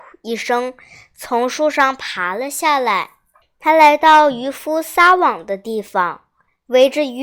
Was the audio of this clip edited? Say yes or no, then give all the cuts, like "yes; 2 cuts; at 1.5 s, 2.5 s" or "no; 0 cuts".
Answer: yes; 1 cut; at 3.4 s